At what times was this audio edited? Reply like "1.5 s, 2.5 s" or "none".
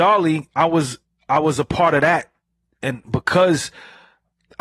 none